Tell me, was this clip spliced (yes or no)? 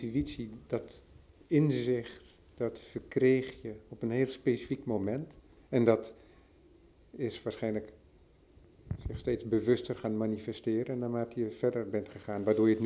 no